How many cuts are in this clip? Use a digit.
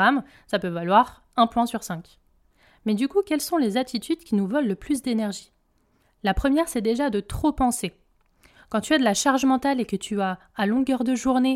0